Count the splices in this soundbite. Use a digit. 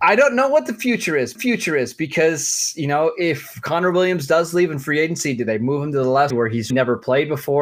3